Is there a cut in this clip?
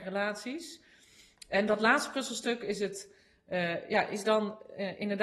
no; 0 cuts

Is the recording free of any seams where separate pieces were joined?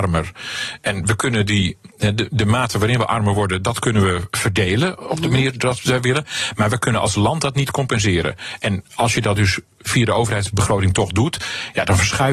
yes; 0 cuts

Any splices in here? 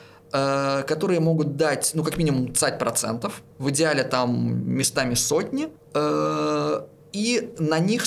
yes; 2 cuts; at 3.5 s, 5.8 s

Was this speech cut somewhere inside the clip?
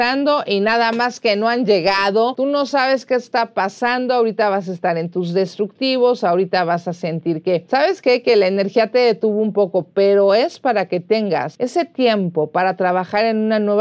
no; 0 cuts

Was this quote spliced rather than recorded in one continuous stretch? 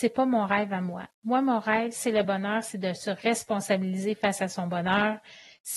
no; 0 cuts

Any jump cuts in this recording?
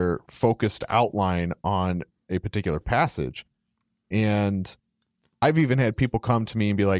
no; 0 cuts

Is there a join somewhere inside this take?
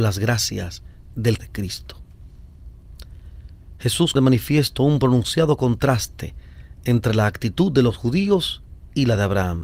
yes; 2 cuts; at 1.4 s, 4.2 s

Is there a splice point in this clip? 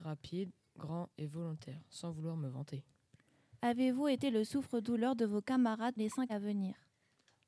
yes; 2 cuts; at 6.0 s, 6.3 s

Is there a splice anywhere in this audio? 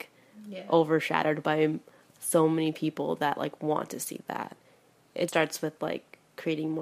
yes; 1 cut; at 5.3 s

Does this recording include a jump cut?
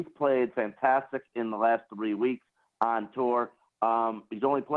no; 0 cuts

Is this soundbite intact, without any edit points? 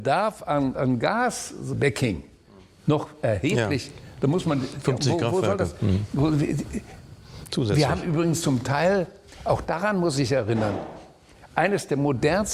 yes; 0 cuts

